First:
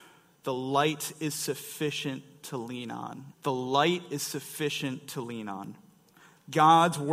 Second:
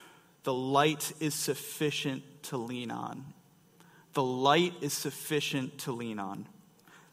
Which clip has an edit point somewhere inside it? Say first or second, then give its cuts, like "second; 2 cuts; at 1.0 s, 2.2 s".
first; 1 cut; at 3.3 s